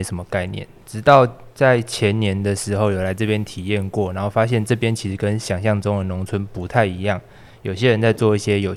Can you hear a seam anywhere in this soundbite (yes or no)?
no